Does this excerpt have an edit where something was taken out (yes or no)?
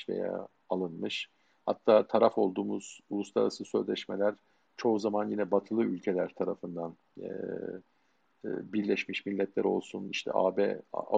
no